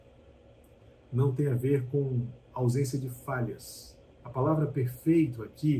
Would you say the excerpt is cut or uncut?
cut